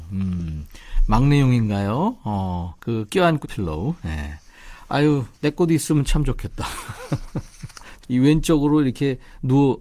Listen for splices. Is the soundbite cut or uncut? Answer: cut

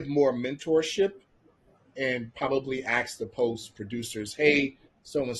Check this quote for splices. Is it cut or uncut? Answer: uncut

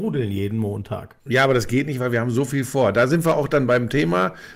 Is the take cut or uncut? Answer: cut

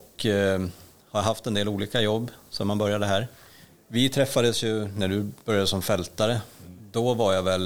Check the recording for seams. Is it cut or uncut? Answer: uncut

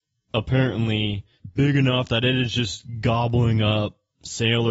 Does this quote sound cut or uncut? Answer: uncut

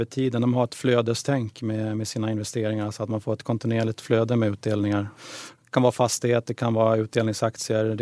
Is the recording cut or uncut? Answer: uncut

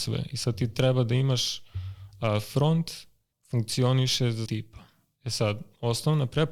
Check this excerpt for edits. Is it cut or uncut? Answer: cut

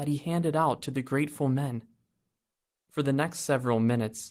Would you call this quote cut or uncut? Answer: uncut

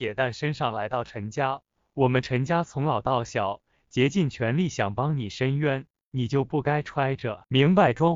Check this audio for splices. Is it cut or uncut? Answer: uncut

